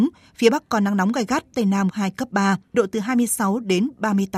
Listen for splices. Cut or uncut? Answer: cut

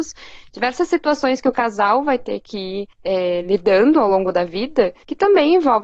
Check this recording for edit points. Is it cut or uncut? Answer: uncut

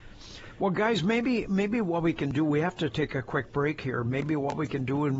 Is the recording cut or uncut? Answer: uncut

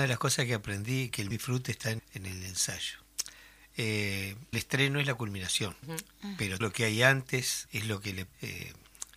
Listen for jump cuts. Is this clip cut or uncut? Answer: cut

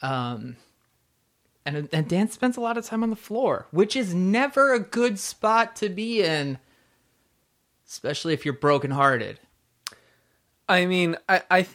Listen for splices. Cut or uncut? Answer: uncut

